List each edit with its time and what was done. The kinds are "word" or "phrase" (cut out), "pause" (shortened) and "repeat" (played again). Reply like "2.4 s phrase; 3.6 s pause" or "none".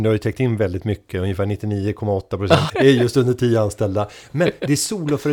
2.7 s phrase